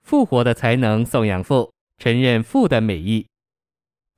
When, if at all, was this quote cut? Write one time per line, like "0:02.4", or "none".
none